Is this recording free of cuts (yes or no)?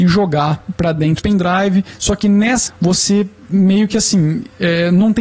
no